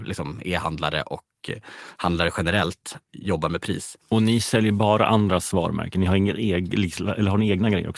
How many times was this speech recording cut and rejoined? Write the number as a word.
one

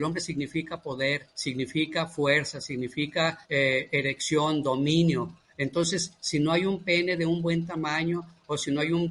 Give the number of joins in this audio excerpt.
two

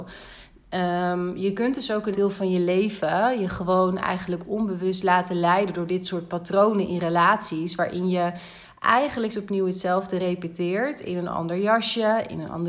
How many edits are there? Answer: two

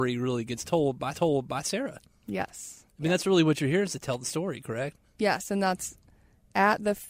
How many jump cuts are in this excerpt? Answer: one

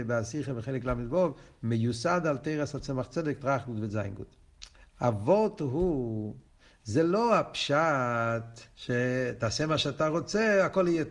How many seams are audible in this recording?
three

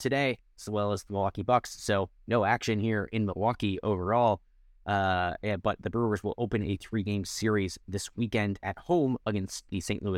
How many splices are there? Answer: zero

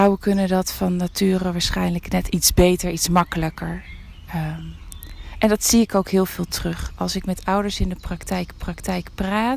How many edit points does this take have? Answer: two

